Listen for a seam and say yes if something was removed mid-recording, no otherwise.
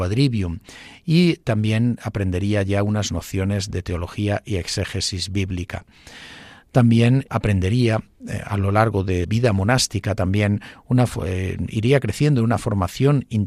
yes